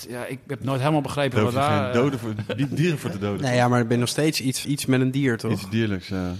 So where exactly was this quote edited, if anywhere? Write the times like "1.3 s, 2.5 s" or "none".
4.6 s